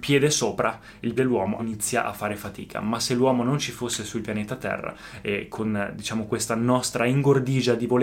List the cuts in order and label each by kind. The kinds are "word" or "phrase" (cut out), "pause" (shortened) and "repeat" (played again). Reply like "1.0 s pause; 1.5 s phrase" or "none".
1.2 s word; 1.6 s word